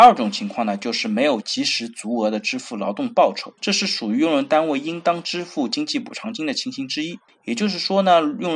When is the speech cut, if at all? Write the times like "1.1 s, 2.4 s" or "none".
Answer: 3.6 s, 7.3 s